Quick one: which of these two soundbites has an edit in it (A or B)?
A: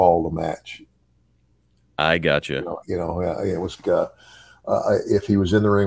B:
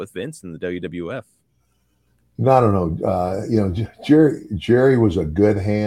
A